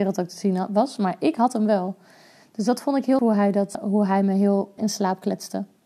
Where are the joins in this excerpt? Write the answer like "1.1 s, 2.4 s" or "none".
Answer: 3.2 s, 3.7 s, 4.8 s